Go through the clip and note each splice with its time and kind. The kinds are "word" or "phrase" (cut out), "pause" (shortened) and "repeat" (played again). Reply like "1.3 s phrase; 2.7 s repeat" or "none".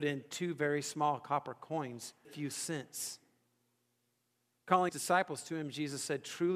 2.2 s phrase; 4.9 s word